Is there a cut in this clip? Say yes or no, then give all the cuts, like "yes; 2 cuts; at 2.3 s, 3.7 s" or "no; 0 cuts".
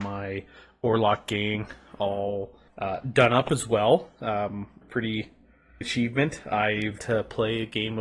yes; 4 cuts; at 2.7 s, 4.8 s, 5.8 s, 7.0 s